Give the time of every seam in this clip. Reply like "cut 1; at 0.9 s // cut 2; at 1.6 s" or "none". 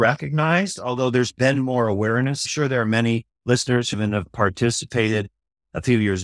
cut 1; at 2.4 s // cut 2; at 3.4 s // cut 3; at 3.9 s